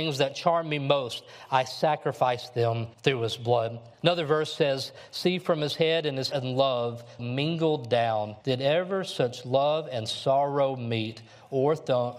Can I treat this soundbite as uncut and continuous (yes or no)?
no